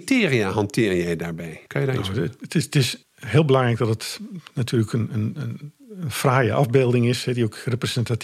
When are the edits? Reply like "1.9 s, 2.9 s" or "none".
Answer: 1.7 s, 3.0 s, 5.8 s